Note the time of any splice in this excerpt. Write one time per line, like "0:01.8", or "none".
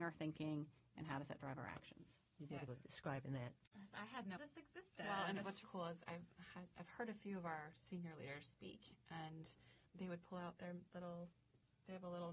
0:02.7
0:04.4
0:05.6
0:09.9